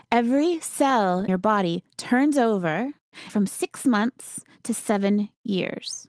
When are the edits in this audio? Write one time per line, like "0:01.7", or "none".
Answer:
0:01.3
0:03.3